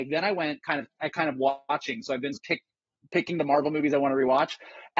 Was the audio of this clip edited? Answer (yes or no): yes